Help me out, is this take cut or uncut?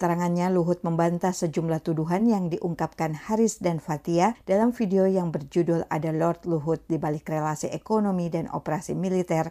uncut